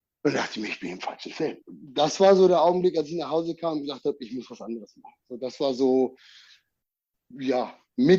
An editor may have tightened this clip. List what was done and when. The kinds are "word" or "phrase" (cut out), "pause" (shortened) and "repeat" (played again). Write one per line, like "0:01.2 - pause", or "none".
0:01.6 - pause